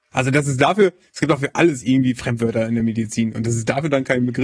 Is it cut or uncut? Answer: uncut